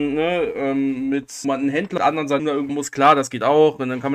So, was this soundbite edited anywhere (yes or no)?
yes